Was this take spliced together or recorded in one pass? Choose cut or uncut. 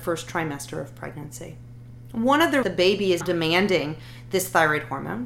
cut